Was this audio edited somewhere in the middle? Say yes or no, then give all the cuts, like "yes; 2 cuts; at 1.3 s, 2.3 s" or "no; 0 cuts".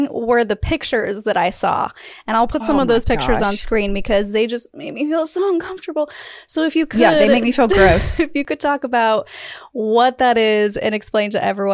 no; 0 cuts